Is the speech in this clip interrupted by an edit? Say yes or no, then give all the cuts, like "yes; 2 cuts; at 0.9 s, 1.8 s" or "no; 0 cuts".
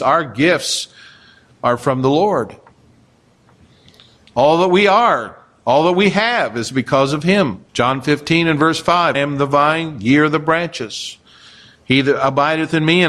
yes; 2 cuts; at 7.7 s, 9.1 s